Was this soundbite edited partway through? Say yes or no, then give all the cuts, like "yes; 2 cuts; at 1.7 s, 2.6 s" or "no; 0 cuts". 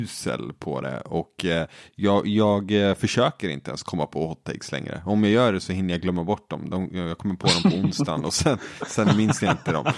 no; 0 cuts